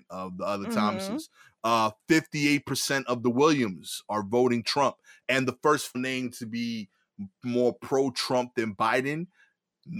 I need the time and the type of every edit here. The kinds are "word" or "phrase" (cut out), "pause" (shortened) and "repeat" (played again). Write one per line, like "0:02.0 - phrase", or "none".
0:05.9 - word